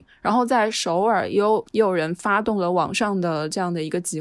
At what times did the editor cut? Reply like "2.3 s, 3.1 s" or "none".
1.7 s